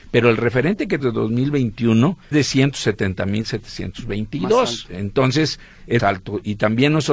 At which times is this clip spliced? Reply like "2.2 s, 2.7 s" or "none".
1.0 s, 2.3 s, 6.0 s